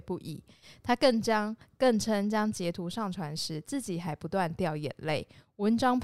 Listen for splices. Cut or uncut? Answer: uncut